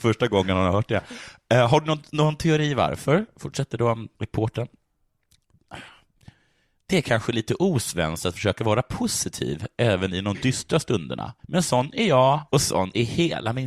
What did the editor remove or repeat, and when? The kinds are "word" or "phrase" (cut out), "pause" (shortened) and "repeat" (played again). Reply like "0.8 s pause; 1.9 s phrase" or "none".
4.1 s pause; 11.4 s pause; 12.5 s pause

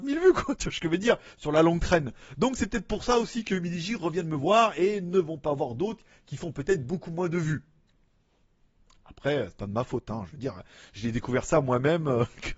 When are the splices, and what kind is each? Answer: none

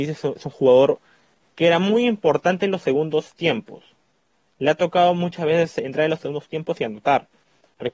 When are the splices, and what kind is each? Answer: none

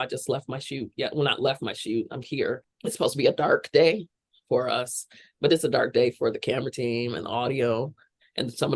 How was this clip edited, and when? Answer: 2.2 s word

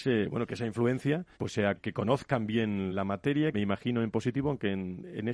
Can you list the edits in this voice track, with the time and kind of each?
1.3 s pause; 1.8 s word; 2.9 s word; 3.5 s phrase

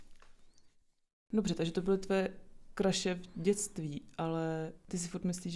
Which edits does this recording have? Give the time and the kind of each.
none

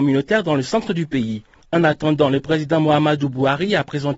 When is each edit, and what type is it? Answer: 1.6 s pause

